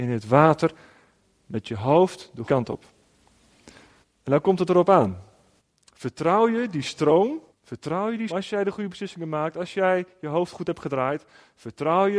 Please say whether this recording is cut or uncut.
cut